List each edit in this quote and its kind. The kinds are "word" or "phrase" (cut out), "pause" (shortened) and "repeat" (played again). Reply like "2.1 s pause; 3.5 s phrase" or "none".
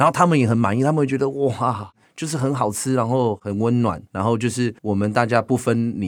2.0 s pause; 4.1 s pause; 4.8 s pause